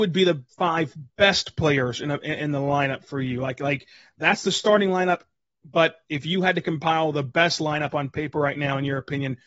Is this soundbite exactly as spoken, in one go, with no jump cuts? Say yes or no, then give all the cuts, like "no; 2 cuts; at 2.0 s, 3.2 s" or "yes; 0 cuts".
yes; 0 cuts